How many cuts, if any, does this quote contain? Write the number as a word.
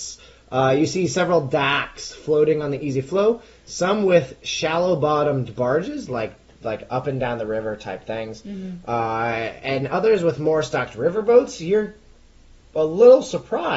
zero